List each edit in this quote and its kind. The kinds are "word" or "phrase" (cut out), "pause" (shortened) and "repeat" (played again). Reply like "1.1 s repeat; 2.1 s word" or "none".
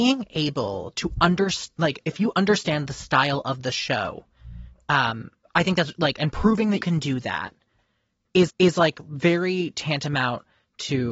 6.8 s word; 8.5 s repeat